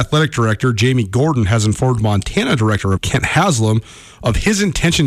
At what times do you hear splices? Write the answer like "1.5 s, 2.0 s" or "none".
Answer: 3.0 s

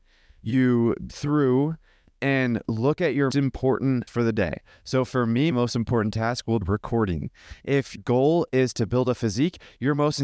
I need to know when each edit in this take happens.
1.1 s, 3.3 s, 4.1 s, 5.5 s, 6.6 s, 8.0 s

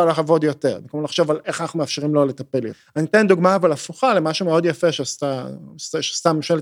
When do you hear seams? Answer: none

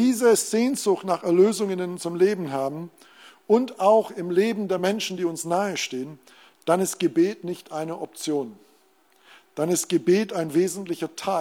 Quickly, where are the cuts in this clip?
none

